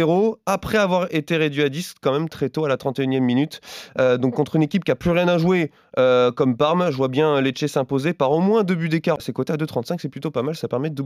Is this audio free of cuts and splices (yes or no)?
yes